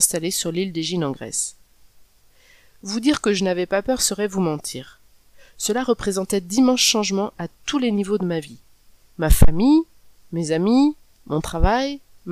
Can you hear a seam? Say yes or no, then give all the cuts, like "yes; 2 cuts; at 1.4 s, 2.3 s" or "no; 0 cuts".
no; 0 cuts